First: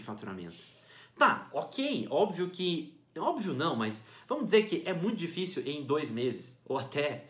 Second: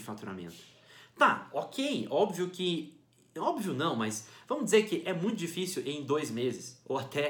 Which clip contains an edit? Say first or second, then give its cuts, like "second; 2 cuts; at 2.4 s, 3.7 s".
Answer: first; 1 cut; at 3.1 s